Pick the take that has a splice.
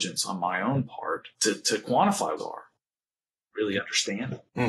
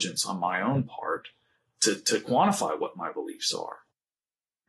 first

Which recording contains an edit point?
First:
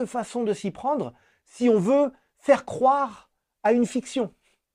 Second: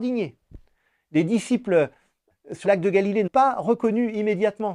second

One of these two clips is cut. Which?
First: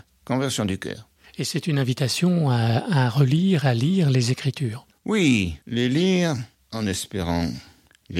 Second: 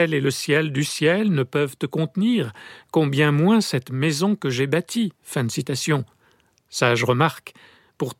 first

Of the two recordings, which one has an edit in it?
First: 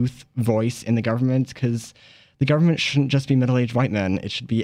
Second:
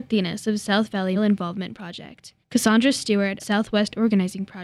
second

